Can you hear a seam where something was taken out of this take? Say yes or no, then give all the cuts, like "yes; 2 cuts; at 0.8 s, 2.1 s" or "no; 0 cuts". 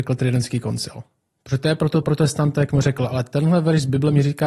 yes; 2 cuts; at 2.0 s, 2.7 s